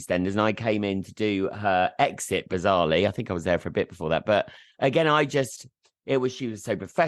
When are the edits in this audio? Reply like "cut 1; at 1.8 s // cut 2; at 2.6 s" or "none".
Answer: none

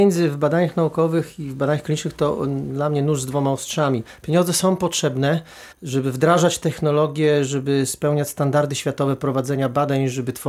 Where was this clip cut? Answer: cut 1; at 5.7 s

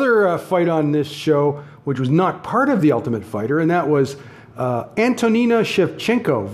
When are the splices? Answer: none

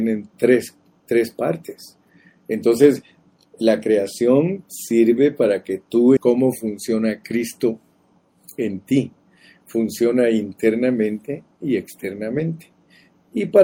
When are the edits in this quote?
cut 1; at 6.2 s

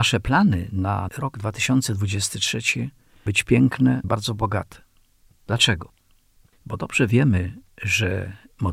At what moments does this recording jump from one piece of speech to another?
cut 1; at 1.1 s // cut 2; at 3.3 s // cut 3; at 4.0 s

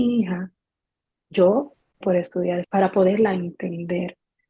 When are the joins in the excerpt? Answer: cut 1; at 2.0 s // cut 2; at 2.6 s

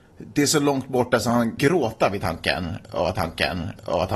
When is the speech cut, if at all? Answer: cut 1; at 1.6 s // cut 2; at 3.1 s

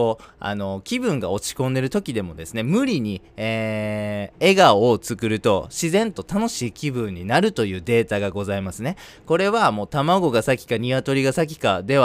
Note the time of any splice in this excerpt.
none

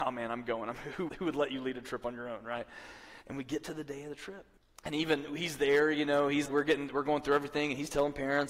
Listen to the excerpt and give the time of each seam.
cut 1; at 1.1 s // cut 2; at 3.2 s // cut 3; at 4.6 s // cut 4; at 6.5 s

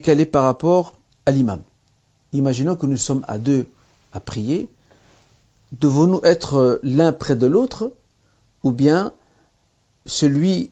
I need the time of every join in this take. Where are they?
cut 1; at 1.1 s

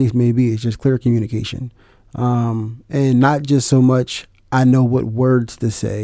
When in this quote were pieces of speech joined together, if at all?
none

